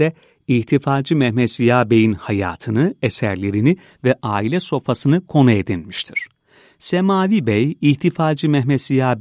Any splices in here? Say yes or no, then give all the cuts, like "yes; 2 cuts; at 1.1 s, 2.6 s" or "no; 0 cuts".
no; 0 cuts